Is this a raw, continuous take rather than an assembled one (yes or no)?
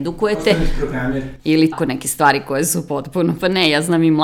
no